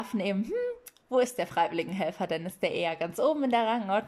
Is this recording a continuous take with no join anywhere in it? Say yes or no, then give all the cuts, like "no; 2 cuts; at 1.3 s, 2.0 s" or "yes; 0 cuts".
yes; 0 cuts